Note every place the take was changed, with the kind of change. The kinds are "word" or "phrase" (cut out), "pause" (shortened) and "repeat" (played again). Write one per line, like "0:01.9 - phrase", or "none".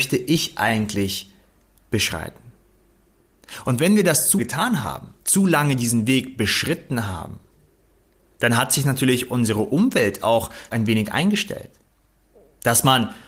0:04.4 - word
0:05.2 - pause
0:10.7 - word